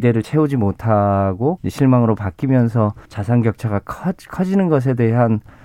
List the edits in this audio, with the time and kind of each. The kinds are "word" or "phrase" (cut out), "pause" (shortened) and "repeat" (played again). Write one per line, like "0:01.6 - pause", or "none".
0:01.6 - word
0:03.0 - pause